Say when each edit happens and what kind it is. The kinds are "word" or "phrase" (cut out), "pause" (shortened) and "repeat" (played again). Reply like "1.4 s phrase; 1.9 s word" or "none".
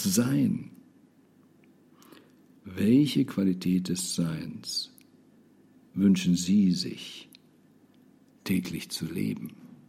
none